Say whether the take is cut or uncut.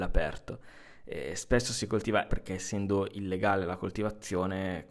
cut